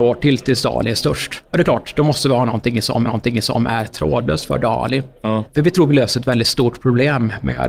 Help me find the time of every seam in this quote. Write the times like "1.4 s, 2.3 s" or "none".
1.5 s, 3.1 s